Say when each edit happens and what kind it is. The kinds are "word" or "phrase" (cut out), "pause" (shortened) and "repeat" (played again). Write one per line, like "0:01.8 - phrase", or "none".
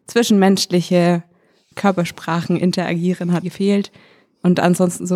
0:01.7 - word
0:03.4 - word